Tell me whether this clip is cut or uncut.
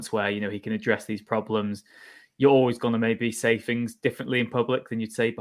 uncut